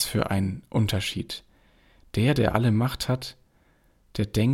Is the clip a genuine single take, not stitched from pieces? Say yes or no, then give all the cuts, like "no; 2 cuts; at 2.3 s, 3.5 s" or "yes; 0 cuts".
yes; 0 cuts